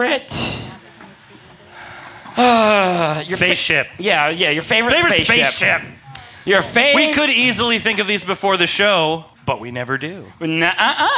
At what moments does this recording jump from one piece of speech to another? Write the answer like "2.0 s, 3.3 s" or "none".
9.3 s

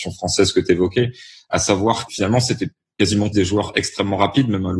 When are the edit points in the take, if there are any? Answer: 2.1 s, 3.3 s

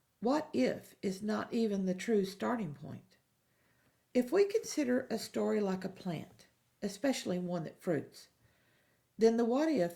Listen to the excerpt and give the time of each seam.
none

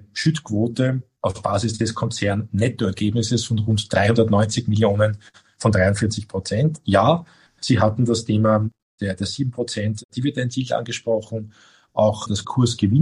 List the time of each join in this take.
none

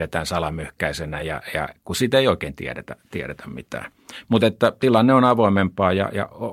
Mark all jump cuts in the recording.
none

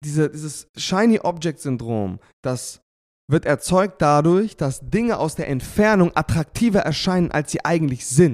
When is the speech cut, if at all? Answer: none

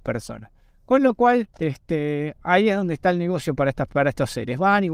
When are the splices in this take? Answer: 1.5 s

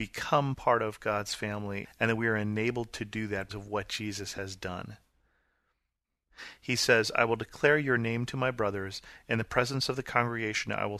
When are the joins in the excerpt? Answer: 3.5 s

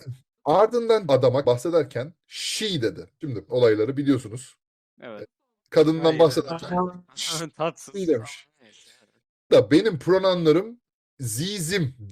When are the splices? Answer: 1.1 s, 1.4 s, 3.5 s, 9.5 s

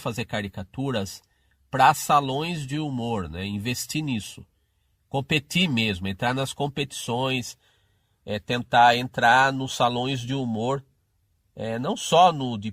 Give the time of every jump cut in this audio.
none

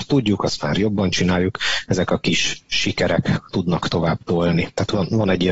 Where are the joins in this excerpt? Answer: none

